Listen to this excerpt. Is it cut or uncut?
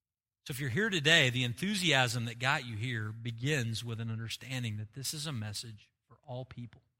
uncut